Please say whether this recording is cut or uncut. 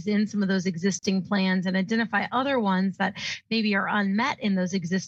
uncut